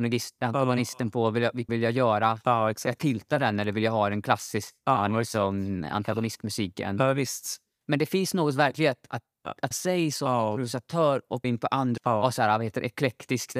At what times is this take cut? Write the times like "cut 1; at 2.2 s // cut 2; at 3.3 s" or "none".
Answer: cut 1; at 1.7 s // cut 2; at 9.7 s // cut 3; at 11.4 s // cut 4; at 12.0 s